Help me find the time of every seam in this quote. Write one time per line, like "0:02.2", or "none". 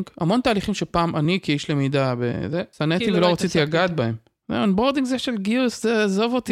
0:02.7